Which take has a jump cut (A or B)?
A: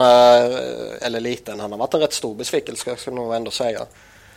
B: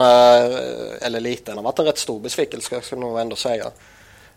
B